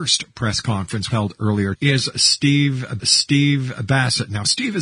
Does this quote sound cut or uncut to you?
cut